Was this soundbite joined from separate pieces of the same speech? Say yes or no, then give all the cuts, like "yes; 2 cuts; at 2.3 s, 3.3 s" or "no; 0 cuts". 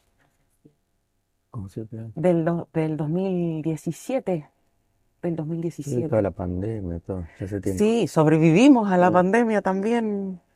no; 0 cuts